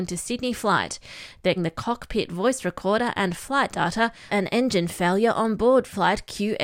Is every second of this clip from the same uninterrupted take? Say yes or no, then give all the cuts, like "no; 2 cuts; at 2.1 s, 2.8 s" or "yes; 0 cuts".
no; 2 cuts; at 1.6 s, 4.3 s